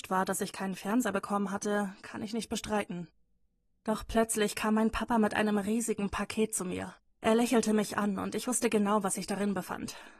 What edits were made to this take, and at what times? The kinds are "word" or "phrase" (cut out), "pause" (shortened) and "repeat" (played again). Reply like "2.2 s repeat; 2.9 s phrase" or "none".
7.1 s pause